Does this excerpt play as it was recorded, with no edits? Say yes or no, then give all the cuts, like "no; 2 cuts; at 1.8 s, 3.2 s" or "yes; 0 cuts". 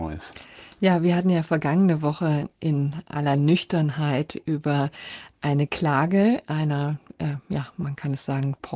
yes; 0 cuts